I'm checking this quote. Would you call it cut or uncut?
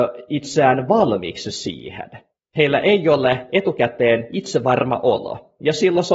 uncut